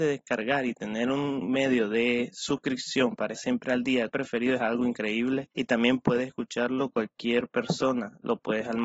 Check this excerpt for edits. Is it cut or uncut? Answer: cut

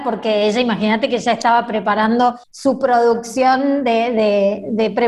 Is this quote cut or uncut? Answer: cut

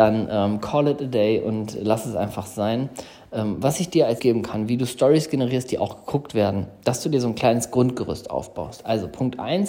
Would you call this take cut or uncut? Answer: cut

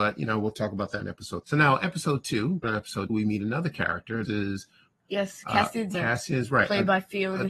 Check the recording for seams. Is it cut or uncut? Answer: cut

